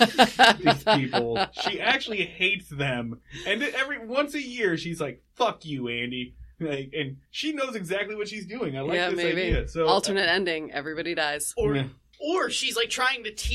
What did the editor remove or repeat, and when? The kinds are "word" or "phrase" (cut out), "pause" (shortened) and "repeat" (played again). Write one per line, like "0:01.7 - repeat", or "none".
0:05.3 - pause
0:07.3 - pause
0:12.1 - pause